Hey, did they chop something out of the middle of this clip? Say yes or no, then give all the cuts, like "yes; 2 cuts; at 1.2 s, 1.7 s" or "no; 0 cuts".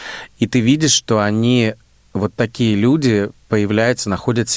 no; 0 cuts